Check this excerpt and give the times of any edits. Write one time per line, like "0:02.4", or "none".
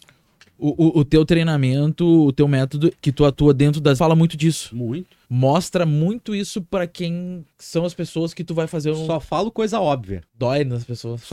0:03.0
0:04.0
0:05.2
0:07.5
0:10.3